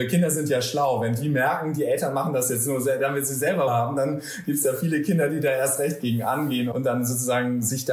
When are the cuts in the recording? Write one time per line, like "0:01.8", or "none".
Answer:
0:03.7